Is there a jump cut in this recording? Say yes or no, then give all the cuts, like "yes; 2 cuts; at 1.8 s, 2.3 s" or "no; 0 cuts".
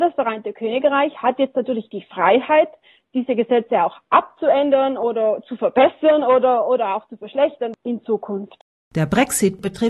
no; 0 cuts